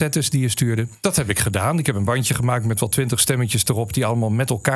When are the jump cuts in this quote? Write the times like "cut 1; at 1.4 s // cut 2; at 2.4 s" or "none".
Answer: none